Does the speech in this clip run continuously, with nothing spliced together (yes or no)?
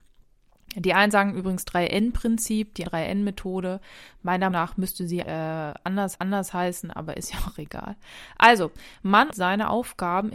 no